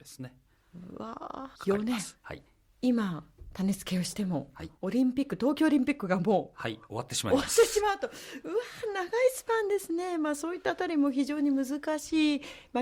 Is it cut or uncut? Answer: cut